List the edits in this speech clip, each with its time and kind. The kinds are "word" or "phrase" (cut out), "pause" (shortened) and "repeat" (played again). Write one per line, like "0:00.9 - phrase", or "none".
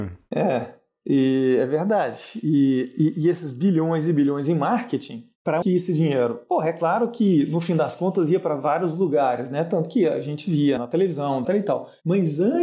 0:05.6 - word
0:10.8 - word
0:11.4 - phrase